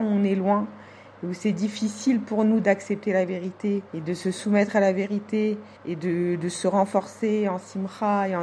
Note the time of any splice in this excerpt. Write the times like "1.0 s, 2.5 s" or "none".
3.9 s, 5.8 s

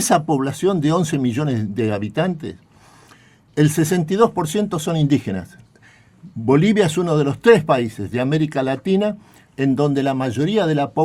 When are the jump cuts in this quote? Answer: none

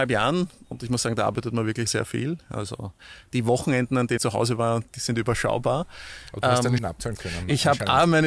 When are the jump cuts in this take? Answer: 1.9 s, 4.2 s, 6.8 s

